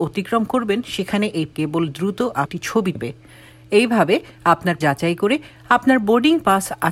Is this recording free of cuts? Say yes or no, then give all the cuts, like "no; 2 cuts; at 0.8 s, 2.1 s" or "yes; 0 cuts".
no; 4 cuts; at 1.5 s, 2.5 s, 3.0 s, 4.8 s